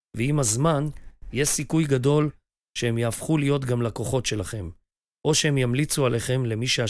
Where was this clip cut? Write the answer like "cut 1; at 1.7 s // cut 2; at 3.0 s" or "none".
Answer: none